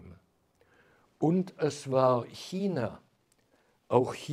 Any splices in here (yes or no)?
no